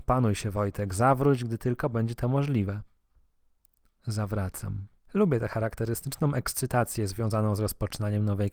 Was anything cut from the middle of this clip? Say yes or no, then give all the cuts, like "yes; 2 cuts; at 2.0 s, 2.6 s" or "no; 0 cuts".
yes; 1 cut; at 5.0 s